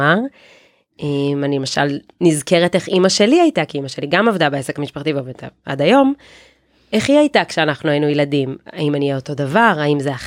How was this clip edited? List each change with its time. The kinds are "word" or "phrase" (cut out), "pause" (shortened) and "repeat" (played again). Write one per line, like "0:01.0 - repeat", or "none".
none